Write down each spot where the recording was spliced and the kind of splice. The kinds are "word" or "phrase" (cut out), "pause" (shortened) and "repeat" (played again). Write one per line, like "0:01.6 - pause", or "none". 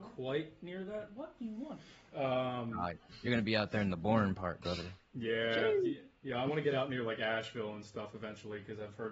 none